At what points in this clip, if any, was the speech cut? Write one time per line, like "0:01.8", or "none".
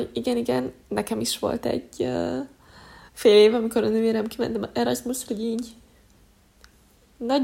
0:03.1
0:05.3